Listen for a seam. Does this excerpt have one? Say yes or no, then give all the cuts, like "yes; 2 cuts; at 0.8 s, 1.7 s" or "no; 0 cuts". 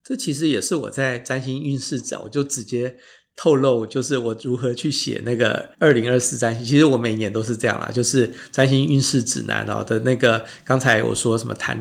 yes; 1 cut; at 5.7 s